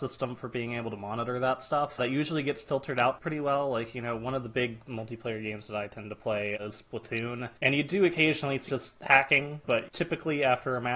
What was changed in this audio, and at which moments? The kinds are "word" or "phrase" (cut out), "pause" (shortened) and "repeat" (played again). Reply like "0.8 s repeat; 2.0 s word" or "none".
7.6 s pause; 8.7 s word